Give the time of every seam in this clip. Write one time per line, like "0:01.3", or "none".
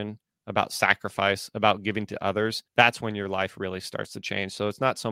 0:02.7